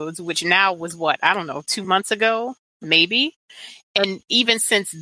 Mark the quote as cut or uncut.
uncut